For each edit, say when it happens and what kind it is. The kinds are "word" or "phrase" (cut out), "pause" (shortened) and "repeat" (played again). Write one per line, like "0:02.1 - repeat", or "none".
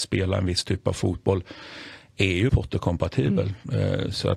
0:02.5 - word